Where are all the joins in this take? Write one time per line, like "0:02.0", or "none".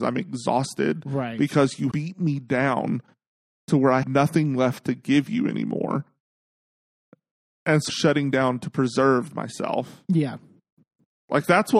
0:01.9
0:04.0
0:07.9